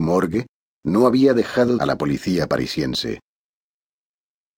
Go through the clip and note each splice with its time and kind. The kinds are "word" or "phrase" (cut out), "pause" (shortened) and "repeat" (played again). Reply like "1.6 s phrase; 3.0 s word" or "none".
1.8 s phrase